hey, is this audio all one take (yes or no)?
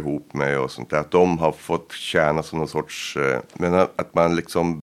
yes